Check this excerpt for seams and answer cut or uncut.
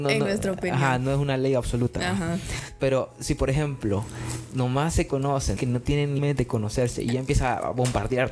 cut